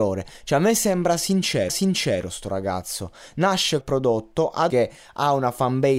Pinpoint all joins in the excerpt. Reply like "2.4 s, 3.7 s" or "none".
1.7 s, 3.8 s, 4.7 s

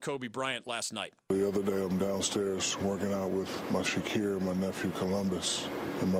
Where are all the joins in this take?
3.8 s

